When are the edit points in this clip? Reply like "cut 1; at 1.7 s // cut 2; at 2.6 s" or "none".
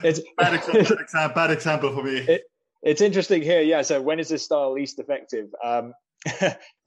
none